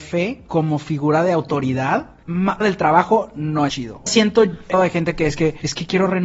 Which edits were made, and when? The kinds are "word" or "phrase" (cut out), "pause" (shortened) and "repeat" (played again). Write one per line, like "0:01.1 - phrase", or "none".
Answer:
0:02.6 - word
0:03.7 - word
0:04.1 - word
0:04.7 - word

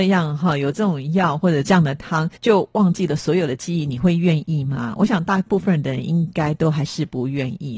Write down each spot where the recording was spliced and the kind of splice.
0:02.4 - pause

